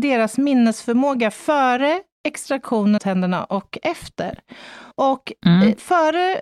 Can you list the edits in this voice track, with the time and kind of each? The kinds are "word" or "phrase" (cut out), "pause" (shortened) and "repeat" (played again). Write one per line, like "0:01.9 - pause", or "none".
0:03.0 - phrase
0:04.9 - pause